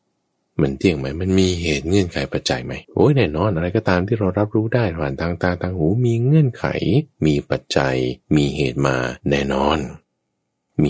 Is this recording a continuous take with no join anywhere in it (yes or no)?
no